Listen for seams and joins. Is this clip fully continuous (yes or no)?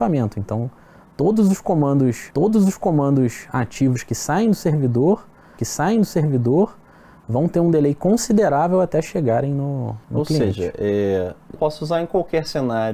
no